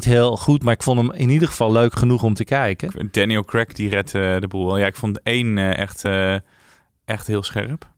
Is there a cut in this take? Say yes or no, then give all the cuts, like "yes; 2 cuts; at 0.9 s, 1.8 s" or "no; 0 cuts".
no; 0 cuts